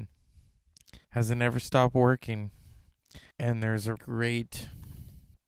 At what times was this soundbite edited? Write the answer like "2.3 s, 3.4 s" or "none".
1.0 s, 3.3 s, 4.0 s